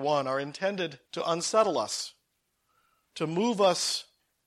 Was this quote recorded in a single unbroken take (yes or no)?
no